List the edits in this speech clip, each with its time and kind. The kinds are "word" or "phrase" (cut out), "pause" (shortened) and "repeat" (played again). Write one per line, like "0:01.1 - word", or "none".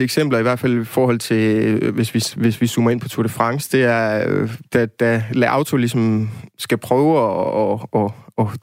none